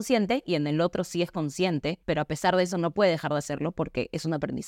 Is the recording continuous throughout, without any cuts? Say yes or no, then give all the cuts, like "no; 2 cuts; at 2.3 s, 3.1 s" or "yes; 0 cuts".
no; 1 cut; at 2.0 s